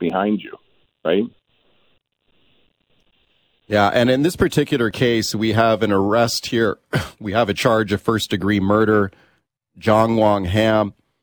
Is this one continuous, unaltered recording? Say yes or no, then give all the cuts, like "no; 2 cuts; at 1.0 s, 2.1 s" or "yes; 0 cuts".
yes; 0 cuts